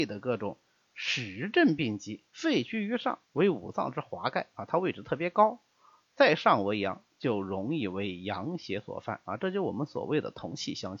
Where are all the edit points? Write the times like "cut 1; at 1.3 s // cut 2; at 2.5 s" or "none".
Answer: cut 1; at 2.3 s // cut 2; at 3.2 s // cut 3; at 6.0 s